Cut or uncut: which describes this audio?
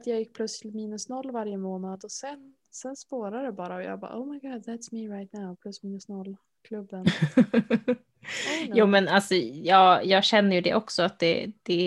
uncut